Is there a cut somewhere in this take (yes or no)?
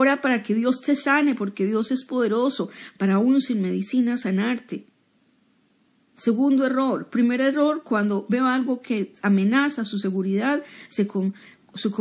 no